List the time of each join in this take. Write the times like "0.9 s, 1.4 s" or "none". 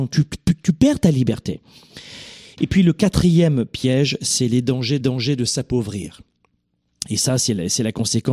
5.0 s